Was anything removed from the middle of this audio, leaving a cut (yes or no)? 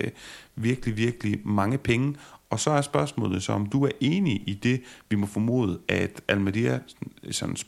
no